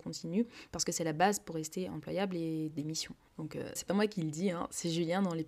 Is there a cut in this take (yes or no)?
yes